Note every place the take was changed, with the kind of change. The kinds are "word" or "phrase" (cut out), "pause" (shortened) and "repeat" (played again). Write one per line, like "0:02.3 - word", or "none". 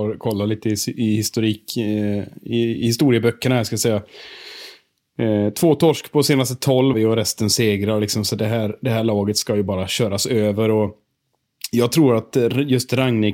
0:06.9 - word